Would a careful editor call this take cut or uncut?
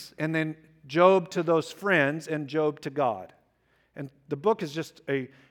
uncut